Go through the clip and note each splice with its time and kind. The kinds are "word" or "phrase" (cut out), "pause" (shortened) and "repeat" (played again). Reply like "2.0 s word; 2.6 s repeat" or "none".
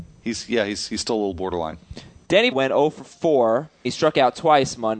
2.5 s word; 3.8 s word